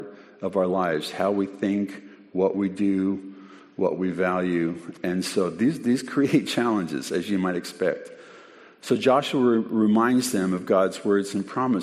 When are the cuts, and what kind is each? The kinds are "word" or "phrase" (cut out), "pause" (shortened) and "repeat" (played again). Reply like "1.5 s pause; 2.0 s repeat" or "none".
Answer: none